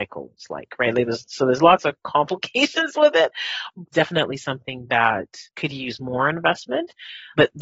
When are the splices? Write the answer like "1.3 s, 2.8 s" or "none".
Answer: 3.9 s, 5.5 s